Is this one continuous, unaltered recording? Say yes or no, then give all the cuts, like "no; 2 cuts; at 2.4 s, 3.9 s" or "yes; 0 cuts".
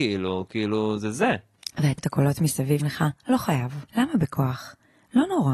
no; 3 cuts; at 2.0 s, 2.8 s, 3.9 s